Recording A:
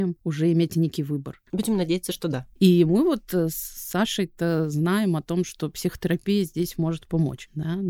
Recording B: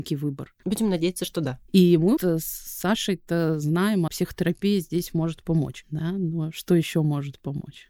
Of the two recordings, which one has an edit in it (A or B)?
B